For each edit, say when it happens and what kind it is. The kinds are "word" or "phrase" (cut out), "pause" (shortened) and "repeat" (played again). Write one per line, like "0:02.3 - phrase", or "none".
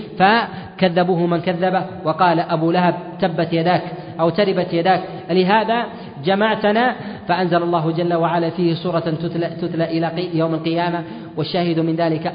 none